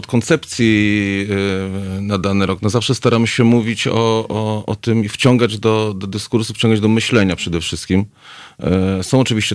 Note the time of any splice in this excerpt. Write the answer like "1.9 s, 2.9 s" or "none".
none